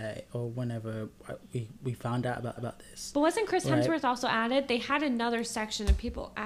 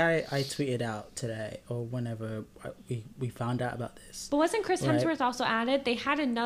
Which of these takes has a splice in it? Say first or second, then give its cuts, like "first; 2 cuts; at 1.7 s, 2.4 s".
first; 1 cut; at 2.6 s